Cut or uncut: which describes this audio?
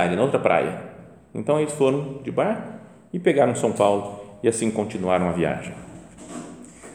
uncut